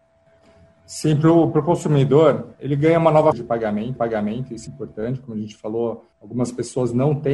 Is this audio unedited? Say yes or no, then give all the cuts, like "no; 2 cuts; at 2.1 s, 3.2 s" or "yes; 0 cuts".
no; 5 cuts; at 2.5 s, 3.3 s, 4.0 s, 4.7 s, 6.1 s